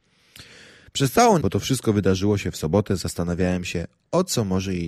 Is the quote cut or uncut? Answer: cut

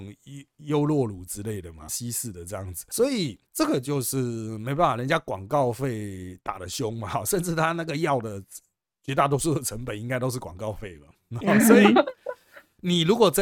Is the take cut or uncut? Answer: cut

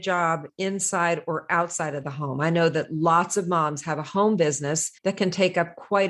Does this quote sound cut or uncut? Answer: cut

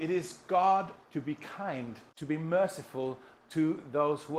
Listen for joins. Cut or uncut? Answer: cut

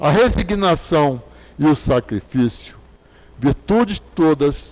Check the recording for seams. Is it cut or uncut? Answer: uncut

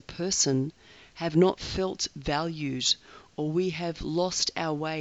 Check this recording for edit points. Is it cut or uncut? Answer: uncut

